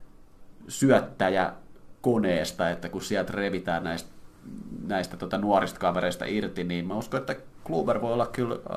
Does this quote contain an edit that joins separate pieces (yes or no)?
no